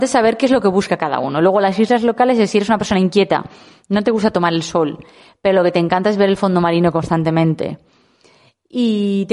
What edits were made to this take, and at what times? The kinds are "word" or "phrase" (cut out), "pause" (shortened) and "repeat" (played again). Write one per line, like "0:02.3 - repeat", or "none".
none